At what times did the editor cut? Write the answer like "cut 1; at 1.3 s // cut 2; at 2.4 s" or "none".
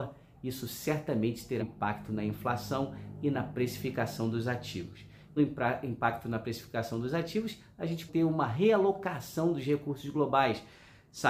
cut 1; at 1.6 s // cut 2; at 5.4 s // cut 3; at 8.1 s